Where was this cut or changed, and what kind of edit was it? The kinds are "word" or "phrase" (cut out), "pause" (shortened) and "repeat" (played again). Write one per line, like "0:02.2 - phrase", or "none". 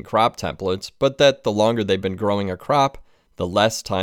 none